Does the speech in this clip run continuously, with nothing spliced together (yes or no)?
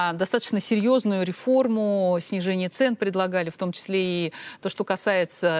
yes